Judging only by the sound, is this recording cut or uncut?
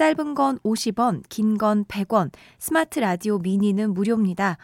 uncut